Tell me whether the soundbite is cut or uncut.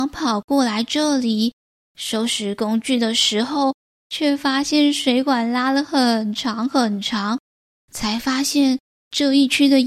uncut